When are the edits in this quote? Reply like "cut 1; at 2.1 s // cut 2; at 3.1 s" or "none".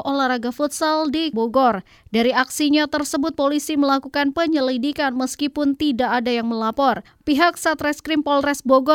cut 1; at 1.3 s

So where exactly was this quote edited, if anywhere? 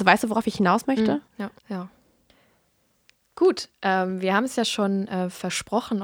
cut 1; at 1.3 s // cut 2; at 1.6 s

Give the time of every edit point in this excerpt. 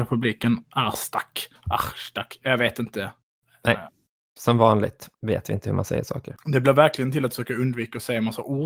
cut 1; at 3.2 s // cut 2; at 5.1 s

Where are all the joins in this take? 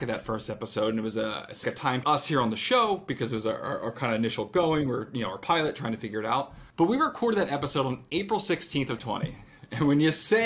cut 1; at 1.6 s // cut 2; at 2.0 s // cut 3; at 6.7 s // cut 4; at 9.0 s

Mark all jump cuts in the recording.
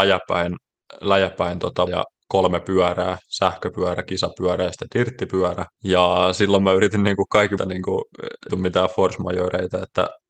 cut 1; at 1.9 s // cut 2; at 5.7 s // cut 3; at 7.6 s // cut 4; at 8.5 s

